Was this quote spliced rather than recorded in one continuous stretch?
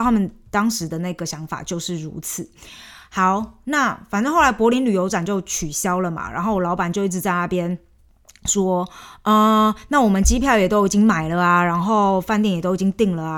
no; 0 cuts

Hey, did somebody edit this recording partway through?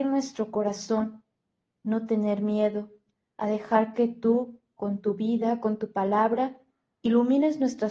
no; 0 cuts

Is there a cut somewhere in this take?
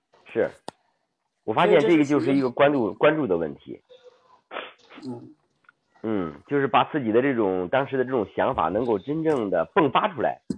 no; 0 cuts

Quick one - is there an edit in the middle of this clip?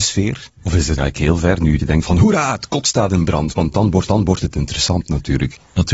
yes; 3 cuts; at 1.0 s, 1.8 s, 4.1 s

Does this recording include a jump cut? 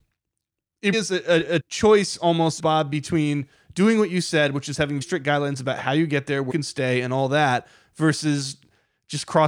yes; 5 cuts; at 0.9 s, 1.6 s, 2.6 s, 5.0 s, 6.5 s

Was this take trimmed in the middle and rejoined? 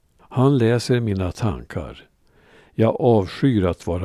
no; 0 cuts

